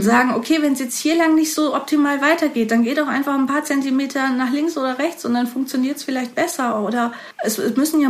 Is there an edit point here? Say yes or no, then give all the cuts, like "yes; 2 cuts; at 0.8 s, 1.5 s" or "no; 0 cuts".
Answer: no; 0 cuts